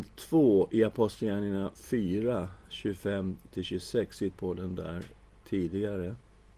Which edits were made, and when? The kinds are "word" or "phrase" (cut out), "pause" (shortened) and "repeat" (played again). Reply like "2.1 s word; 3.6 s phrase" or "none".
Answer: 4.3 s word